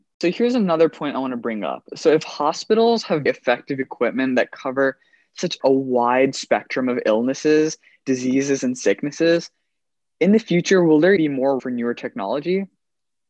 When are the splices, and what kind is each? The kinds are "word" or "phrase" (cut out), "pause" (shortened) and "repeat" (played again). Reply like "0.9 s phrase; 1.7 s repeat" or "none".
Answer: 3.3 s word; 5.6 s word; 11.2 s word; 11.6 s word